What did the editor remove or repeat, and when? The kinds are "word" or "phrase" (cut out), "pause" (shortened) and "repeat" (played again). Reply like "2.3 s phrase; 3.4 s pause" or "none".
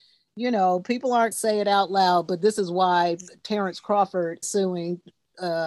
1.3 s word; 4.4 s word